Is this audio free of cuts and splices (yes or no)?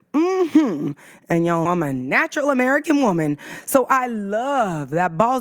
no